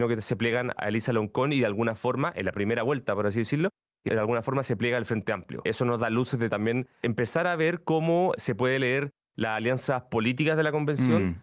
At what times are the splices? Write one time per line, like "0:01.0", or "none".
none

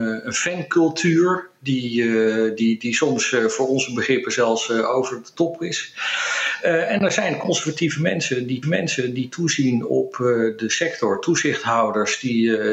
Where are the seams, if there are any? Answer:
0:08.6

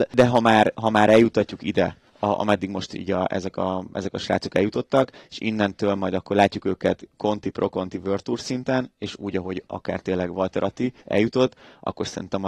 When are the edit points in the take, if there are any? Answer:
0:02.1
0:11.0

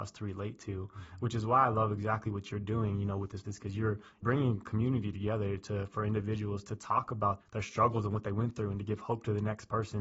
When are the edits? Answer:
0:03.4
0:04.2
0:06.6
0:07.4

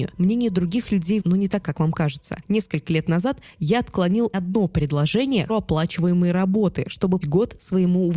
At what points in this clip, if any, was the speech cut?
0:01.2
0:01.6
0:04.3
0:05.5
0:07.2

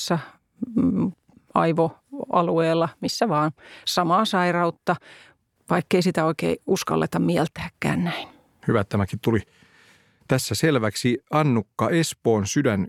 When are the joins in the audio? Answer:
none

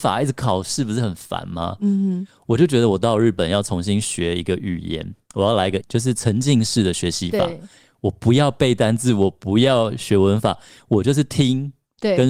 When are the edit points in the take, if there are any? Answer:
0:05.8

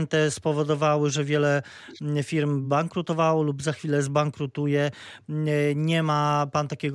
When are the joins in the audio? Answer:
none

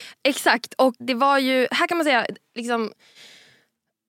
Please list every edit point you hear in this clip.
0:01.0

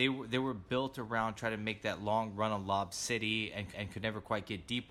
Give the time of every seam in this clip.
0:03.7

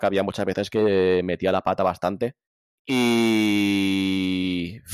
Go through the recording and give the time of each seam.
0:02.5

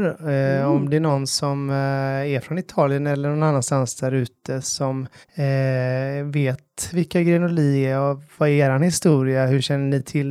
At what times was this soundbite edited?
0:05.2

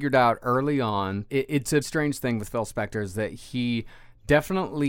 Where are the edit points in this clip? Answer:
0:01.3
0:01.8

